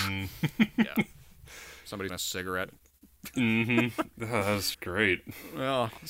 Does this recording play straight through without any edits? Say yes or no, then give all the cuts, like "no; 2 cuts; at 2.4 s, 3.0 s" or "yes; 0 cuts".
no; 2 cuts; at 2.1 s, 4.7 s